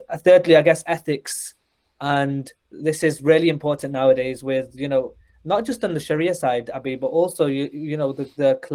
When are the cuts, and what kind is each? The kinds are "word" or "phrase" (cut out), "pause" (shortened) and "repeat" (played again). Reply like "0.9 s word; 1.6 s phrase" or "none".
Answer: none

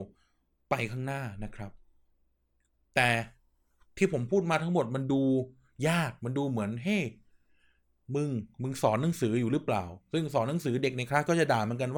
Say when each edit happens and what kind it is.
none

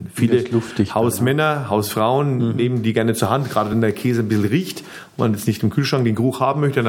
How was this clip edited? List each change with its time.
none

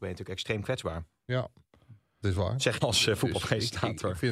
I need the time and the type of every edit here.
2.2 s word; 2.8 s word

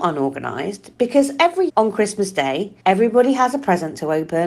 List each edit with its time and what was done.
1.7 s word; 2.8 s pause

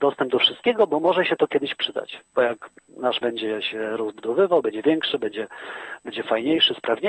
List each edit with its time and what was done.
3.2 s word

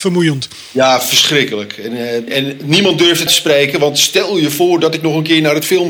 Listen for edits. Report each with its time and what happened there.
2.3 s word; 3.3 s word

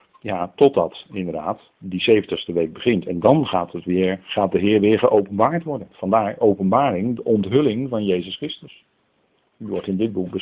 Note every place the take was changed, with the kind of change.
1.7 s pause

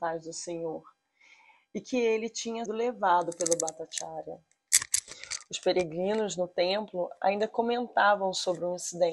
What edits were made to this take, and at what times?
2.7 s word

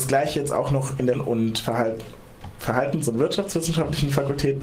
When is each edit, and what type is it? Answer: 1.1 s word

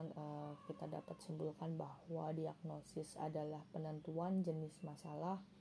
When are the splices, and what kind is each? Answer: none

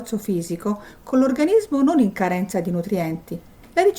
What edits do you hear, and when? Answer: none

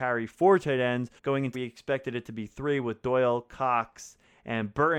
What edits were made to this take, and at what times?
1.2 s pause; 1.5 s phrase

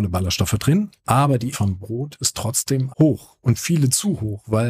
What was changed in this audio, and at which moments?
1.5 s word; 2.9 s word; 3.6 s word

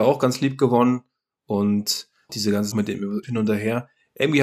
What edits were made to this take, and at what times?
2.3 s word; 2.7 s word; 3.2 s word

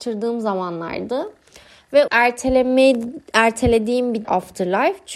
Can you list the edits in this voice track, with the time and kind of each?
2.1 s phrase; 4.2 s word

